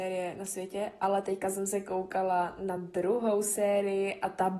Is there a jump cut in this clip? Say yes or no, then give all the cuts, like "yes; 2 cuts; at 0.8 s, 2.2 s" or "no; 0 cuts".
no; 0 cuts